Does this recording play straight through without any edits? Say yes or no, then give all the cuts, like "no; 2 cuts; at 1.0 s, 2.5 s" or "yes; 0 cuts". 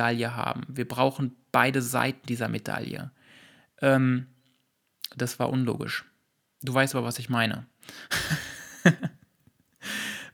yes; 0 cuts